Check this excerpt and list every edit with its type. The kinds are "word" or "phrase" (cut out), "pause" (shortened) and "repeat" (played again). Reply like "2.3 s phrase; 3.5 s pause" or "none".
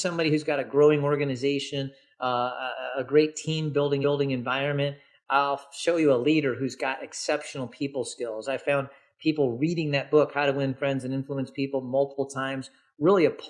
4.0 s repeat